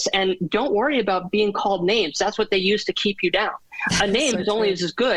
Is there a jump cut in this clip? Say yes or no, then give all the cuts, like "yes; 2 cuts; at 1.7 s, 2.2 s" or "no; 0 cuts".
no; 0 cuts